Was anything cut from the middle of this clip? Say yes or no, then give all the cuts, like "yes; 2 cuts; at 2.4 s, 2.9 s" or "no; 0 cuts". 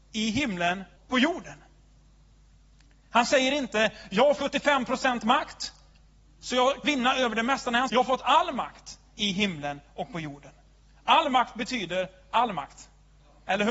yes; 4 cuts; at 1.0 s, 4.4 s, 6.8 s, 7.9 s